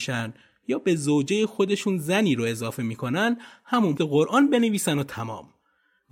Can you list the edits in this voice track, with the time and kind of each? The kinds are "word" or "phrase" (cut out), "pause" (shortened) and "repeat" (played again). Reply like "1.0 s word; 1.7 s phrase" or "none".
4.0 s word